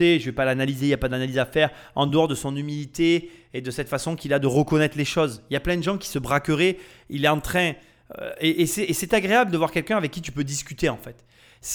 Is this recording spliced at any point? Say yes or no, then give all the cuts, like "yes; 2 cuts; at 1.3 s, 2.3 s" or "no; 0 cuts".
no; 0 cuts